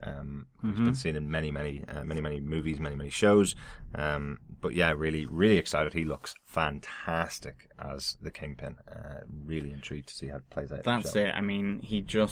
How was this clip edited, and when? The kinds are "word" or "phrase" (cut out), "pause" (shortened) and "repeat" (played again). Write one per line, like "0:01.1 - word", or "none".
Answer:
none